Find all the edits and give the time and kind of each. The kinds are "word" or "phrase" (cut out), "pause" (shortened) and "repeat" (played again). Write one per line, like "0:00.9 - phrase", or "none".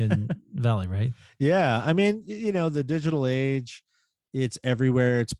none